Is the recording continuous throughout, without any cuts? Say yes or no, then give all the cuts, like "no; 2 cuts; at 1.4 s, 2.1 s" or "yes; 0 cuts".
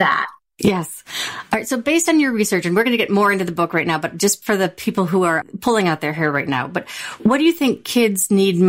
yes; 0 cuts